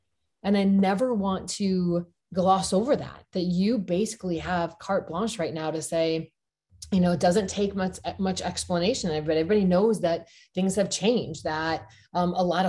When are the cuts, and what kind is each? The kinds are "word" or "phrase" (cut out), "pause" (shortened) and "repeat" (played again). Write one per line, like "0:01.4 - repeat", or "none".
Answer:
none